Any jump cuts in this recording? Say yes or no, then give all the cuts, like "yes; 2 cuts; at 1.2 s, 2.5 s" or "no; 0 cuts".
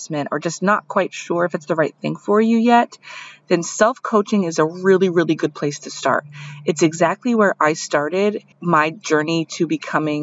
yes; 1 cut; at 8.5 s